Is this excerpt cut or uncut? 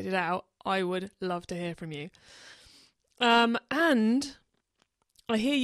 uncut